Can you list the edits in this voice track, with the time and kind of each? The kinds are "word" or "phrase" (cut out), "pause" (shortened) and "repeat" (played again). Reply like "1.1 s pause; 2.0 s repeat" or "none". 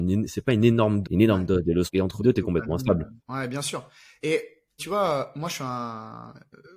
1.0 s phrase; 1.9 s word; 2.2 s word; 3.2 s pause; 4.8 s word